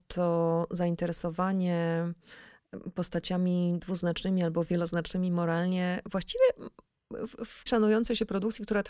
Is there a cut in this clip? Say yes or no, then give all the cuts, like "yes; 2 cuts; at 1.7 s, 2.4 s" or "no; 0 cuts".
yes; 1 cut; at 7.7 s